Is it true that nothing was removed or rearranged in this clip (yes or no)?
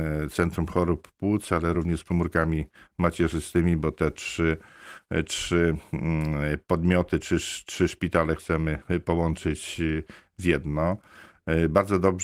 yes